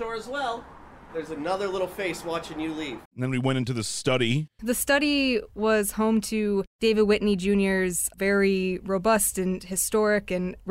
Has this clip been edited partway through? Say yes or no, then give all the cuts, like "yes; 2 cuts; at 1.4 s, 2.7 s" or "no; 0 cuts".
yes; 1 cut; at 3.1 s